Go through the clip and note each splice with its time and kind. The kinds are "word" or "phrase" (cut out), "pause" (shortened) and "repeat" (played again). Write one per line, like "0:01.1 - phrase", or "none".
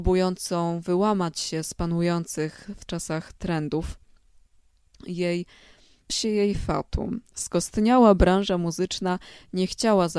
0:02.9 - word
0:06.1 - phrase